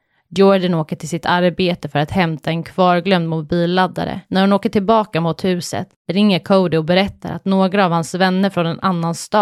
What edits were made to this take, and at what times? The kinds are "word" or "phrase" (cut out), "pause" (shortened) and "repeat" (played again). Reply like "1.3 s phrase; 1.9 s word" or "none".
4.2 s pause; 6.0 s pause